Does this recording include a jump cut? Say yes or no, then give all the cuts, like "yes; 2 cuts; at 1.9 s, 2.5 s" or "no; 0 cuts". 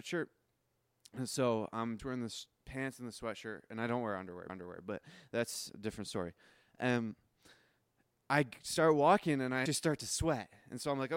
yes; 3 cuts; at 2.0 s, 4.5 s, 9.7 s